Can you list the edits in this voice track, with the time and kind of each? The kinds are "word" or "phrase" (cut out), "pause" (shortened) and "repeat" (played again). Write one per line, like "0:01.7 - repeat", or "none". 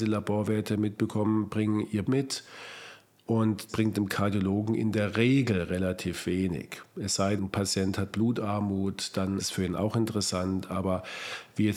0:02.0 - word
0:03.7 - word
0:07.4 - word
0:08.1 - word
0:09.4 - word